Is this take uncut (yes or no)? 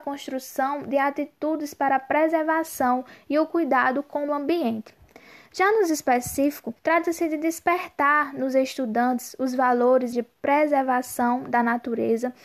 no